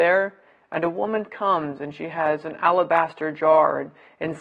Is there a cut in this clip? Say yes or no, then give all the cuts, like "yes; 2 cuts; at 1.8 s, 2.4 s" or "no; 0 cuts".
no; 0 cuts